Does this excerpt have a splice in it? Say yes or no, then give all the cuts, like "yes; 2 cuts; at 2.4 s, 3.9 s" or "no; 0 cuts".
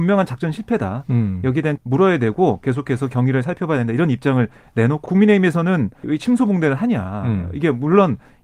yes; 3 cuts; at 1.8 s, 5.1 s, 6.0 s